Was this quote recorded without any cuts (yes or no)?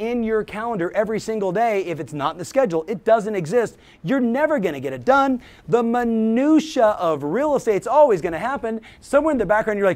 yes